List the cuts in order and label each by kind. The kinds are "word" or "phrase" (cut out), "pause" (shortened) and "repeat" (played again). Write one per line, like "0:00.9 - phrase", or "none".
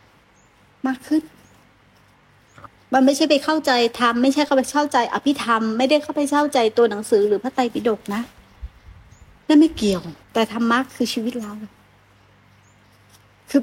0:10.2 - pause